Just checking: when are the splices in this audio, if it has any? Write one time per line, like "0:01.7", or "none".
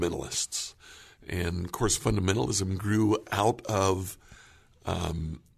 none